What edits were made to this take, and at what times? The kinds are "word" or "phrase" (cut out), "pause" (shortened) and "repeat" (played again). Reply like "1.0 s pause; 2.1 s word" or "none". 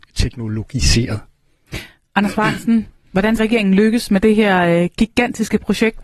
3.4 s word